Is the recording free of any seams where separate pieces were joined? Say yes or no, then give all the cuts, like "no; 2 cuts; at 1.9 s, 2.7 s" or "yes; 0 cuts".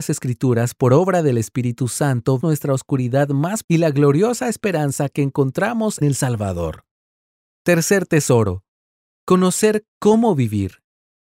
no; 3 cuts; at 2.4 s, 3.6 s, 6.0 s